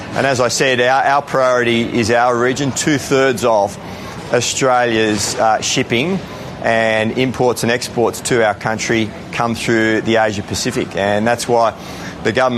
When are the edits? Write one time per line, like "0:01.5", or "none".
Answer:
none